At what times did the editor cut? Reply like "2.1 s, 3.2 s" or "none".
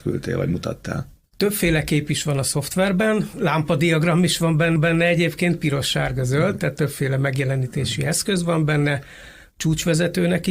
4.8 s